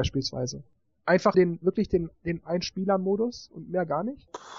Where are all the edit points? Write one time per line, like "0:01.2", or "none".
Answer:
0:01.3
0:02.4